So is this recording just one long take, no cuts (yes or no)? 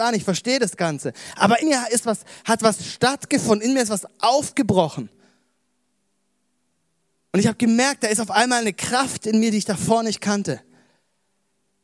no